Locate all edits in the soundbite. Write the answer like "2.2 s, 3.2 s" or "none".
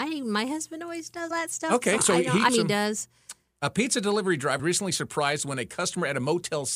1.3 s, 2.0 s, 2.5 s, 4.6 s